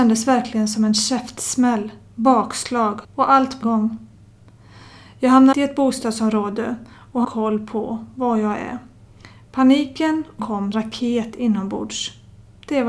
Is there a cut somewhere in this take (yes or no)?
yes